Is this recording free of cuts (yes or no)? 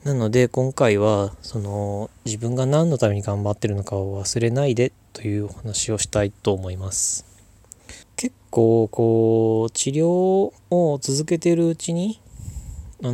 no